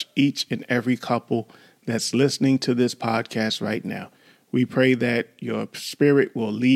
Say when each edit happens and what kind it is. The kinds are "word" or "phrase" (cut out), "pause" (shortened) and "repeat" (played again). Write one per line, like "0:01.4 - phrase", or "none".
none